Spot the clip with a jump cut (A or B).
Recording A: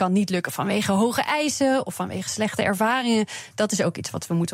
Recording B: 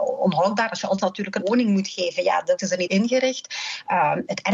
B